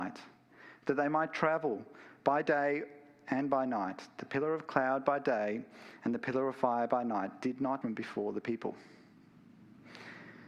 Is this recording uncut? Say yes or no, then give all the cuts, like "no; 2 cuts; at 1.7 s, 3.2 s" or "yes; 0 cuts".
no; 1 cut; at 7.8 s